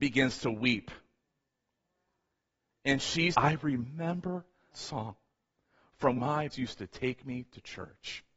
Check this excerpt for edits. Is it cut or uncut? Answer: cut